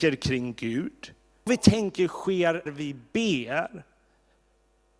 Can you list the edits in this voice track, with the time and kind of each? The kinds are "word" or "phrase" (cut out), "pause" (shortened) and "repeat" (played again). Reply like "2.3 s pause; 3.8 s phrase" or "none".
1.5 s word; 2.7 s word